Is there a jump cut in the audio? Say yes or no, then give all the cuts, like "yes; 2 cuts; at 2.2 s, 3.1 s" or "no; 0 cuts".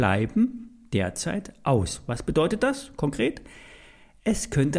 no; 0 cuts